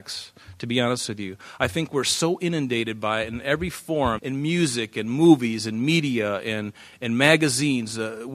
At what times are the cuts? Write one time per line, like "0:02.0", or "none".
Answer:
0:04.2